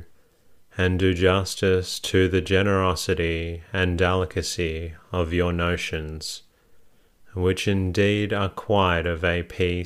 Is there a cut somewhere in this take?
no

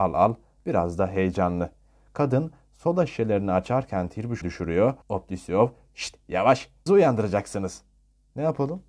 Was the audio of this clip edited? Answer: yes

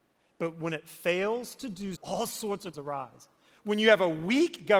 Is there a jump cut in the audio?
yes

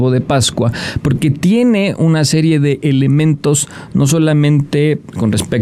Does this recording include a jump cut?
no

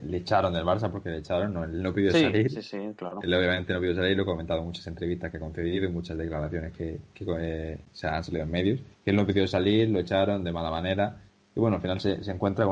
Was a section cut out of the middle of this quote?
yes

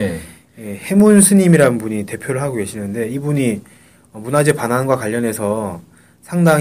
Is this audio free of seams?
yes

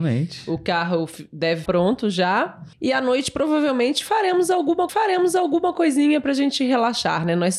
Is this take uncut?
no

